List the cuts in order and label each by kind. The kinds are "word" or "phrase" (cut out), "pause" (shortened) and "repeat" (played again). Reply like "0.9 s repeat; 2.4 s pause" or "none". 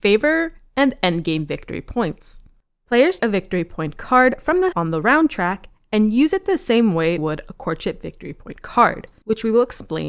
3.2 s word; 4.7 s word; 7.2 s word